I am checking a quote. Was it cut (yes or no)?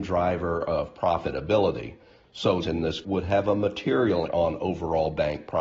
yes